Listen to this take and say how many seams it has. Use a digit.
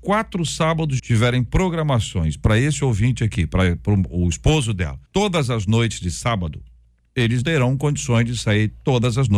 3